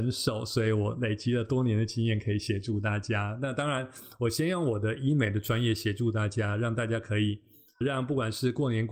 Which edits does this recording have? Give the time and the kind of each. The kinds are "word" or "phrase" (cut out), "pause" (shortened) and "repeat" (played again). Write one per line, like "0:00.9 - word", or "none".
0:07.8 - word